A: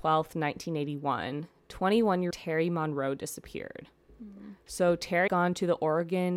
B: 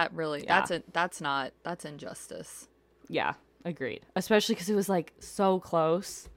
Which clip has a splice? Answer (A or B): A